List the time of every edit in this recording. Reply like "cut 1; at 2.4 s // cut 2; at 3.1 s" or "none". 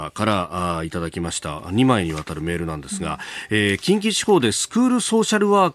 none